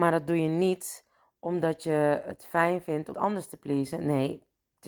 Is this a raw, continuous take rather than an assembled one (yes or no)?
no